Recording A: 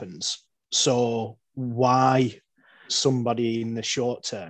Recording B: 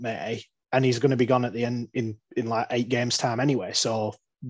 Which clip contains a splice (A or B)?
A